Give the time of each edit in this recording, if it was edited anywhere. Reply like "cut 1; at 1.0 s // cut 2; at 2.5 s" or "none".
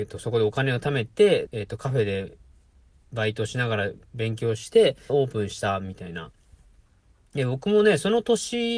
cut 1; at 1.5 s // cut 2; at 5.1 s